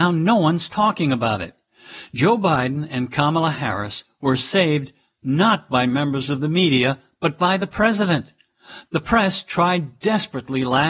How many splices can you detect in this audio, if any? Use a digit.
0